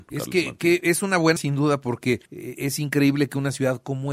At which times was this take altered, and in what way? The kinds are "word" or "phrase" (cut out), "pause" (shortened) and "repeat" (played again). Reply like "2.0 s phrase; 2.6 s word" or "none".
1.4 s word; 2.3 s pause